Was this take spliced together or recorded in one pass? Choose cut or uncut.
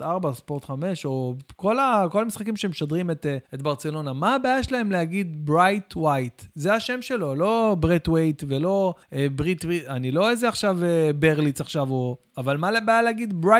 cut